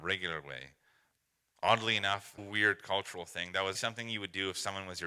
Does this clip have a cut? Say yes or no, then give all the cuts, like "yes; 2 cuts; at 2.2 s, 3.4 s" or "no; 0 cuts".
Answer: yes; 2 cuts; at 2.4 s, 3.7 s